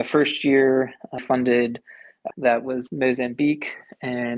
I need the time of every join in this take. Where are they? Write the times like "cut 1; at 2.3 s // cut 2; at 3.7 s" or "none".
cut 1; at 1.2 s // cut 2; at 2.3 s // cut 3; at 2.9 s